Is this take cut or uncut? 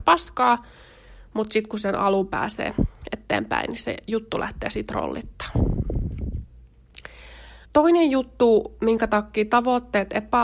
cut